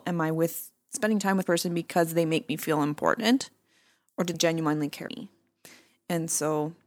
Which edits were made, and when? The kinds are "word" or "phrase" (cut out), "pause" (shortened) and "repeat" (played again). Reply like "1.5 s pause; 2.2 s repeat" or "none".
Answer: 1.4 s word; 4.3 s word; 5.1 s word